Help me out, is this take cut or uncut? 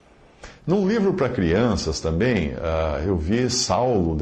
uncut